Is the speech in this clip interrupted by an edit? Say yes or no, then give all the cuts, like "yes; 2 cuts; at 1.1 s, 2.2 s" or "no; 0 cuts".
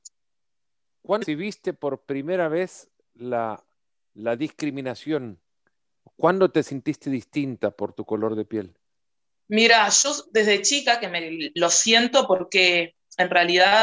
yes; 1 cut; at 1.2 s